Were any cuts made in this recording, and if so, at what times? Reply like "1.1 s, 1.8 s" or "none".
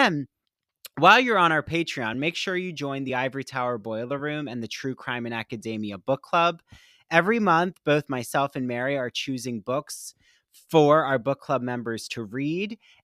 none